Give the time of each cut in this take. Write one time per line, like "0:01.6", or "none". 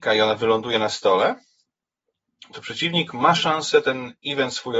none